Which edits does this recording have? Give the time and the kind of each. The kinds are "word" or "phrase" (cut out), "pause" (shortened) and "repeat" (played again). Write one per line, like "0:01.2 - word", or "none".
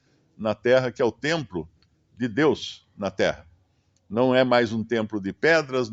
none